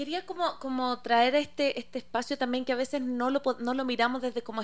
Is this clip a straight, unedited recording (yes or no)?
yes